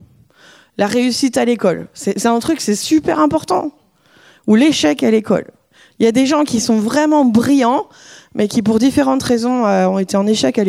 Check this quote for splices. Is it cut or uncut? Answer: uncut